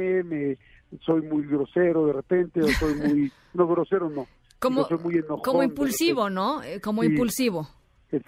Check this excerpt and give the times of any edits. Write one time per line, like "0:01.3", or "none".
none